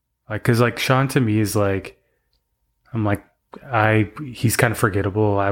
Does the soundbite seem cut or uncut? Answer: uncut